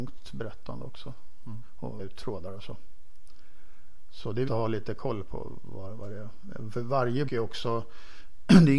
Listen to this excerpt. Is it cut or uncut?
cut